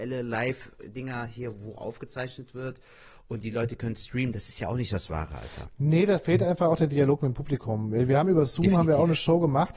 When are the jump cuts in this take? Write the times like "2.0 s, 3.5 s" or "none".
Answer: none